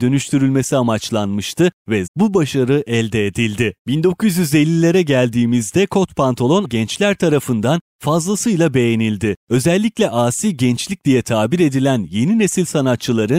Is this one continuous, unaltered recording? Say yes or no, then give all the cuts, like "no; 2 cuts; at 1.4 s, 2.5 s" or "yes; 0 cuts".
no; 3 cuts; at 2.1 s, 3.8 s, 6.6 s